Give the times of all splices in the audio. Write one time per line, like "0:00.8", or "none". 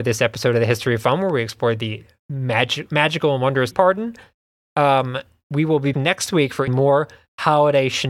0:03.7
0:05.9
0:06.7

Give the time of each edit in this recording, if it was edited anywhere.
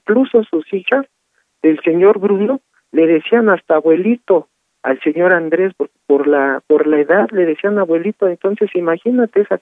none

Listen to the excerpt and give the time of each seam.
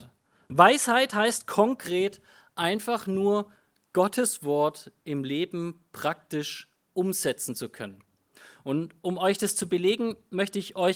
none

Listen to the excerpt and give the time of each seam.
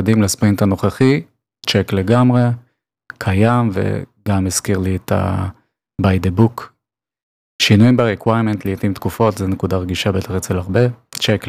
none

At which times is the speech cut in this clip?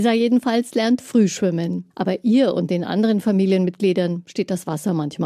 0:01.9

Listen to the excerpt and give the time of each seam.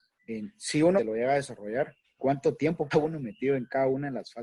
0:01.0
0:02.0
0:02.9

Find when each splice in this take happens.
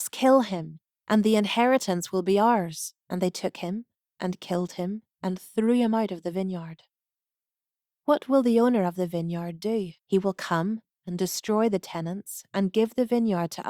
0:03.0
0:05.1
0:10.0

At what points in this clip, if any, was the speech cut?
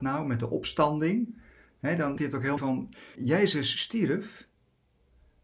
0:02.2
0:02.6
0:03.1

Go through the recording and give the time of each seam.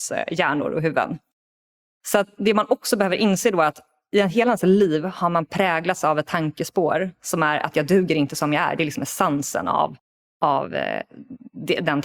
none

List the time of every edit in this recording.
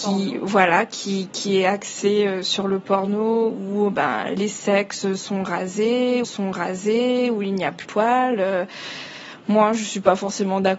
0:04.4
0:06.2
0:07.8

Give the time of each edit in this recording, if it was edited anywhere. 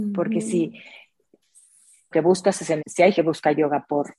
0:02.1
0:02.8
0:03.2

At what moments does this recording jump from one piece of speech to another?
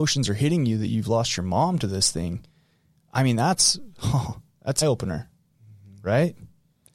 0:04.8

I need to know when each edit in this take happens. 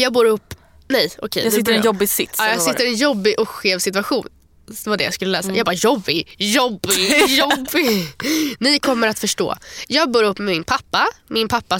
none

